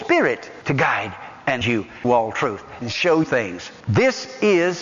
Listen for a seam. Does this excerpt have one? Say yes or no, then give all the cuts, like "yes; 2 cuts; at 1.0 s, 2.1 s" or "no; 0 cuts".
yes; 4 cuts; at 1.6 s, 2.0 s, 2.8 s, 3.2 s